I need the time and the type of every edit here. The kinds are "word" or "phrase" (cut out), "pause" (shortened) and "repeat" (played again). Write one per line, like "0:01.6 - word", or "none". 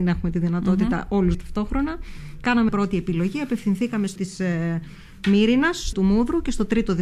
0:01.3 - word
0:02.7 - word
0:04.2 - word
0:05.9 - word